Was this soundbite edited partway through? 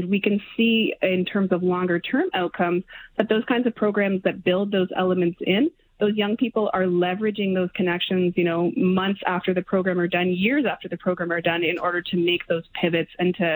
no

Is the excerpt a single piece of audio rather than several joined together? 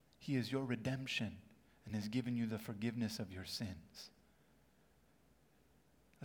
yes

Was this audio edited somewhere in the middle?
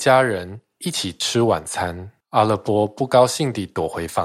yes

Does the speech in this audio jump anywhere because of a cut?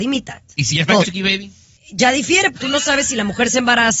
yes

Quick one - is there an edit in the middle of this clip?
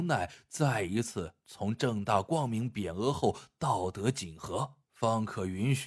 yes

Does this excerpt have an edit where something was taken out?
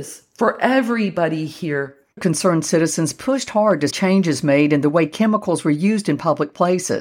yes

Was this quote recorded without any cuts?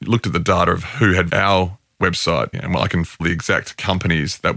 no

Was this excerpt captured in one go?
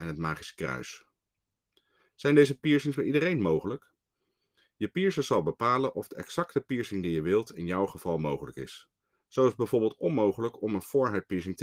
yes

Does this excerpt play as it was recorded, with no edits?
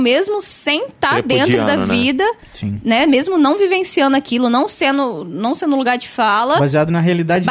yes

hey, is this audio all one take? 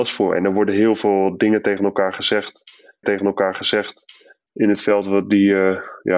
no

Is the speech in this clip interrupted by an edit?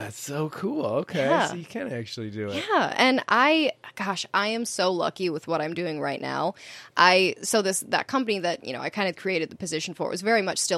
no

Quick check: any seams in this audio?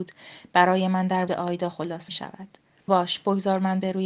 yes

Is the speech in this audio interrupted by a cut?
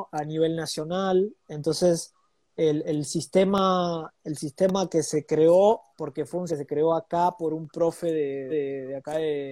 yes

